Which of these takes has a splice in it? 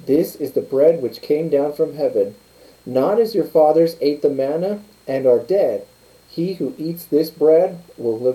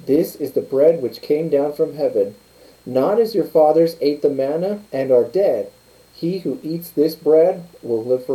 second; 1 cut; at 4.9 s

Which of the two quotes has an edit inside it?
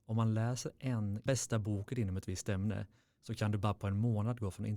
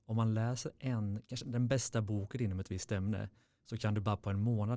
first; 1 cut; at 1.3 s

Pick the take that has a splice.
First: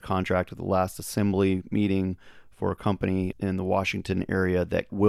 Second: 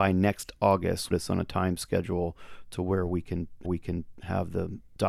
second; 2 cuts; at 1.1 s, 3.6 s

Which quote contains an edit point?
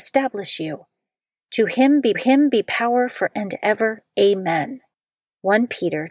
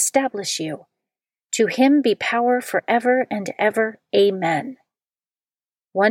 first; 3 cuts; at 2.1 s, 3.3 s, 4.9 s

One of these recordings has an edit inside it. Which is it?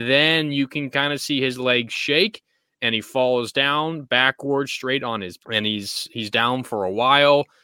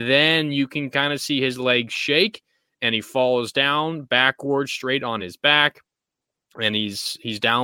first; 1 cut; at 5.4 s

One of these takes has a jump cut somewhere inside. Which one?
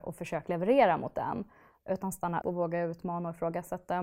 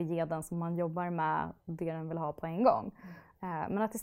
first; 1 cut; at 2.4 s

